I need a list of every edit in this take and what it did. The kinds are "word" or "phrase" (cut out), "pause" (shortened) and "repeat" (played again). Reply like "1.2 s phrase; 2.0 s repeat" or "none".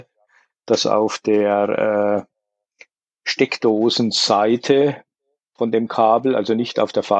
none